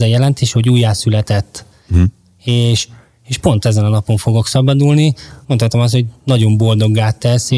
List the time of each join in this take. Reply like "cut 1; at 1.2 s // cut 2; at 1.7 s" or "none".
cut 1; at 5.4 s